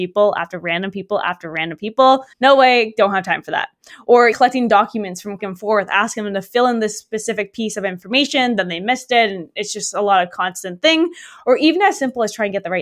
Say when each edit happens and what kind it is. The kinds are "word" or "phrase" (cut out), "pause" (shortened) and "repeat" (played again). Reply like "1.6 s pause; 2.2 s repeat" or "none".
2.3 s pause; 4.3 s word; 5.4 s phrase